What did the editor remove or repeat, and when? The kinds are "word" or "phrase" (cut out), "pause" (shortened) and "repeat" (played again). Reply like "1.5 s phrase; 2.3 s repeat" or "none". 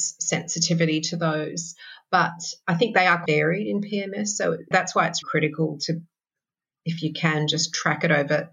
2.6 s word; 3.3 s word; 4.7 s word; 5.2 s word